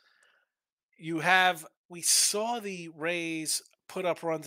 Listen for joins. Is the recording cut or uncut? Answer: cut